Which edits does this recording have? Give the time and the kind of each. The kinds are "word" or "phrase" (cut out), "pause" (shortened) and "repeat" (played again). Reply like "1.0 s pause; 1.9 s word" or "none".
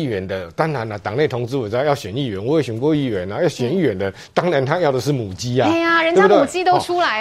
none